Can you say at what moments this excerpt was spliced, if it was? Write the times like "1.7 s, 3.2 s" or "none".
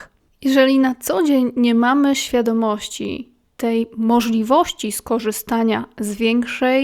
none